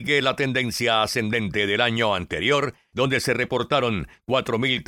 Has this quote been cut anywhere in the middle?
no; 0 cuts

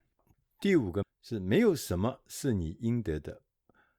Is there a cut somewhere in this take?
yes; 1 cut; at 1.0 s

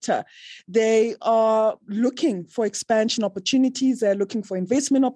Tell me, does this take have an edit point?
no; 0 cuts

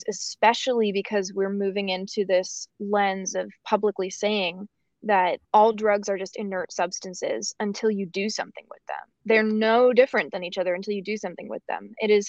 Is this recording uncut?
no; 1 cut; at 5.4 s

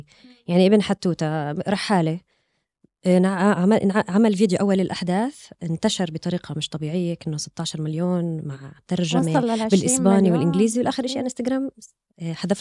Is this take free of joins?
yes; 0 cuts

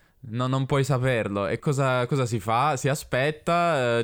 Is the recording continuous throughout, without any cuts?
no; 1 cut; at 1.6 s

